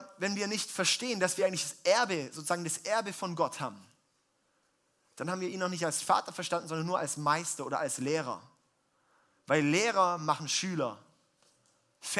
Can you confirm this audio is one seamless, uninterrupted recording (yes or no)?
yes